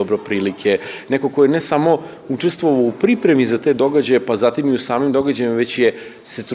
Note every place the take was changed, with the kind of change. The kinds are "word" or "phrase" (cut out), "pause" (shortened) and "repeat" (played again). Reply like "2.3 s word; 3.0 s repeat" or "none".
none

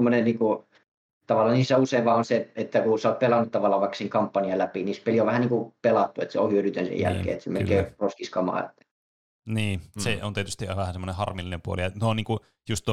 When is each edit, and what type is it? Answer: none

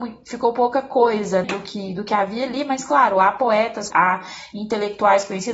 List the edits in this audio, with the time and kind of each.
1.4 s word; 3.9 s word

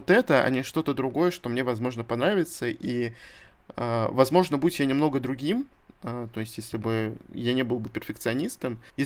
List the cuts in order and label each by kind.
7.9 s word

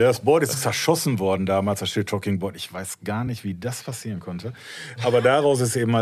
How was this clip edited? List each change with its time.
none

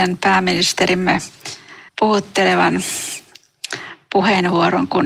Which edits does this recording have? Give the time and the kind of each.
1.9 s pause

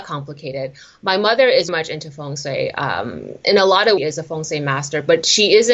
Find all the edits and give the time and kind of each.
1.7 s word; 4.0 s phrase

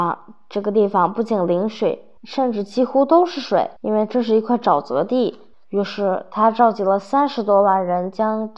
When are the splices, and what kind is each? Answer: 2.2 s pause; 3.8 s pause; 5.5 s pause

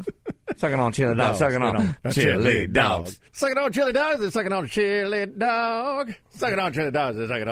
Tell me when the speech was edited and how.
3.3 s pause; 6.2 s pause

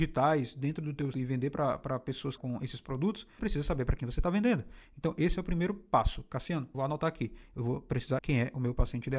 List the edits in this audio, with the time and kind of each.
1.1 s word; 2.4 s phrase; 3.4 s word; 6.7 s word; 8.2 s word

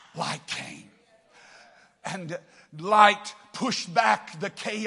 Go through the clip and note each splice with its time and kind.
none

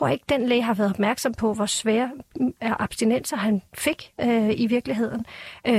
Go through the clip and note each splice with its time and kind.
none

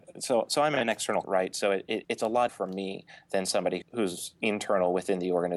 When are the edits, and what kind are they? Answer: 1.2 s word; 2.0 s word; 2.5 s word; 3.8 s word

